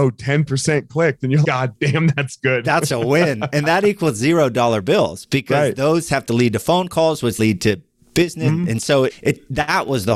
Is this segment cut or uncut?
cut